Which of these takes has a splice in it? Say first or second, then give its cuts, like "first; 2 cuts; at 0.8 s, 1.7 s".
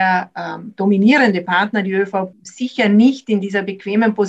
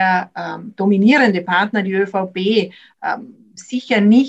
first; 1 cut; at 2.3 s